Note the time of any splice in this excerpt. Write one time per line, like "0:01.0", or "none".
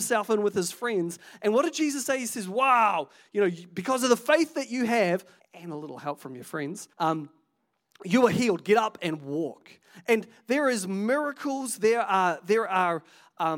0:05.4
0:06.9